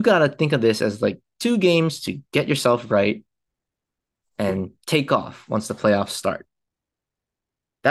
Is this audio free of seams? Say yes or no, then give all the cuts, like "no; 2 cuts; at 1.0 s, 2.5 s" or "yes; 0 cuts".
yes; 0 cuts